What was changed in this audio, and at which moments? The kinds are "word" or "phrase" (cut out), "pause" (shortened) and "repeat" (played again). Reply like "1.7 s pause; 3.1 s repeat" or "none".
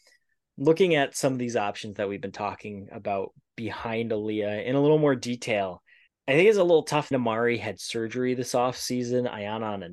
6.1 s pause; 7.1 s phrase